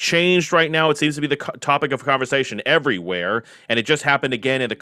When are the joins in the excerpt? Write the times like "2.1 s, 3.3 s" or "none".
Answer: none